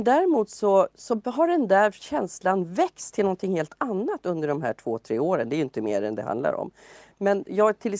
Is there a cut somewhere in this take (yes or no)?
no